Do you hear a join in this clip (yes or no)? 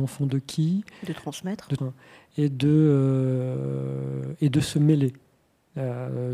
yes